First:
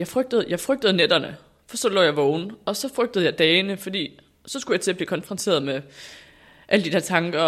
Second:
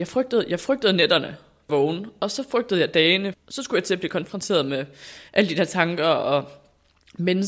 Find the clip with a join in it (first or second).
second